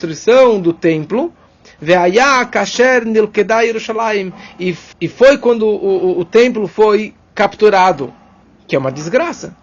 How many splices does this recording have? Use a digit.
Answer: 0